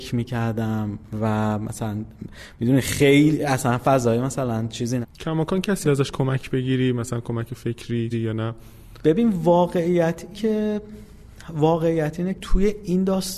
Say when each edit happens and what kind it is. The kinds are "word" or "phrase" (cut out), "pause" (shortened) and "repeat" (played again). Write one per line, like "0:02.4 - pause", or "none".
0:03.8 - word
0:05.0 - word
0:05.8 - word
0:08.1 - word
0:10.3 - word
0:12.3 - word